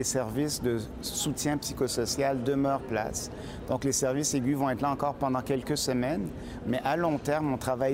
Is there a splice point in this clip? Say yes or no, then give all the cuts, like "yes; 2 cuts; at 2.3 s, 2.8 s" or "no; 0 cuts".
yes; 1 cut; at 2.8 s